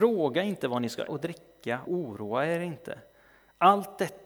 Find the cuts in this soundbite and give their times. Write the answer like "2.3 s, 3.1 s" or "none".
1.1 s, 1.9 s